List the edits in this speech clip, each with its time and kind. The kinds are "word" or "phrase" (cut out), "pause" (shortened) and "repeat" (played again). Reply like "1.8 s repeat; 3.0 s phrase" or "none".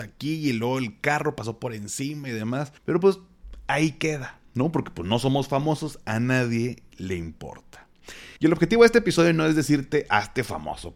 2.8 s pause; 8.4 s pause

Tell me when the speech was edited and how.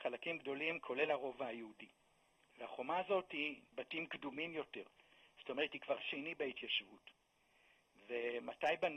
3.7 s word; 6.0 s word

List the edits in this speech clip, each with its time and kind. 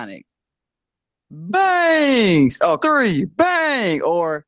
2.8 s phrase

